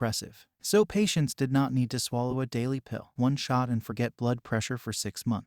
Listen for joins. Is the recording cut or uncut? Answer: cut